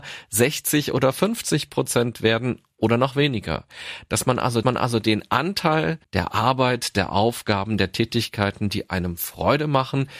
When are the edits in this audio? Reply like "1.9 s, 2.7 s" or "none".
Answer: 4.6 s, 6.0 s